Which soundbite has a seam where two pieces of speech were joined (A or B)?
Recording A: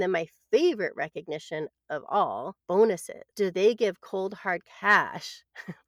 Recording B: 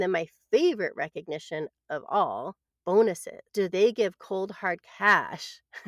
A